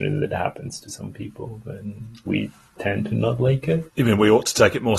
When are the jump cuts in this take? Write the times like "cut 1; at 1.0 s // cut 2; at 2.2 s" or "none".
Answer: cut 1; at 2.3 s // cut 2; at 3.9 s